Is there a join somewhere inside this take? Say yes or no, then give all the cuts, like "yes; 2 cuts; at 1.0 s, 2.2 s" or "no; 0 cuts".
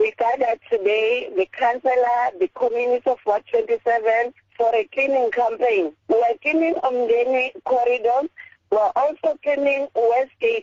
yes; 1 cut; at 6.0 s